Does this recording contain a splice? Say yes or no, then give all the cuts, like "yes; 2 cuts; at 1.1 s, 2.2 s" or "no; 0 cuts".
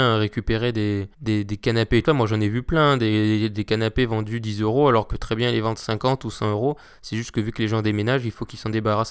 yes; 3 cuts; at 1.1 s, 2.1 s, 5.1 s